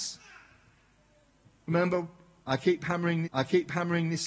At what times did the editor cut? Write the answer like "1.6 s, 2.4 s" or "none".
3.2 s